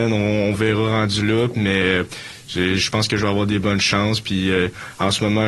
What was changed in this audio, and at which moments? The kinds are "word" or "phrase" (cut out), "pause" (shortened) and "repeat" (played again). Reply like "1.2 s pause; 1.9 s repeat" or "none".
none